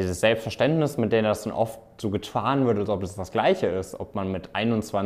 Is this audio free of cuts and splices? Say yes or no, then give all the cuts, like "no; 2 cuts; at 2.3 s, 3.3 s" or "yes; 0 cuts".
yes; 0 cuts